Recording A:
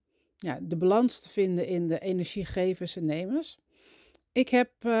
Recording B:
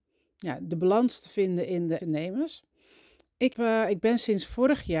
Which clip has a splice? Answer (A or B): B